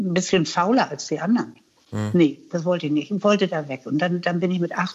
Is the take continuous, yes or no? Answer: yes